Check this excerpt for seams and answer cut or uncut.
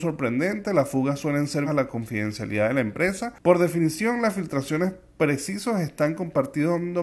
cut